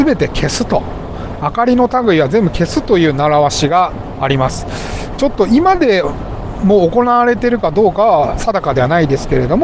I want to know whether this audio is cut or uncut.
cut